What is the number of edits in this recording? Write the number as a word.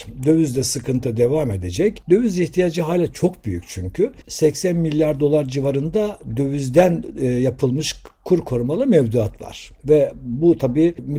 one